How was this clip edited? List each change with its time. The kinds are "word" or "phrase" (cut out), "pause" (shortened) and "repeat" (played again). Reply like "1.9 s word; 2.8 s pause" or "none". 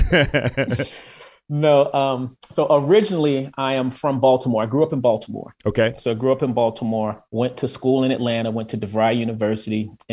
7.3 s pause

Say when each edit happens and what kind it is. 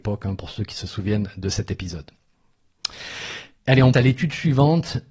3.6 s pause; 3.9 s word

